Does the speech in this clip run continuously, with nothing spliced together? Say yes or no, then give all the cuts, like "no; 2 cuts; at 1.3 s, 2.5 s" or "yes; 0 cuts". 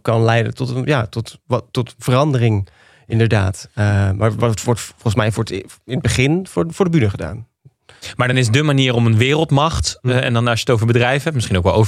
yes; 0 cuts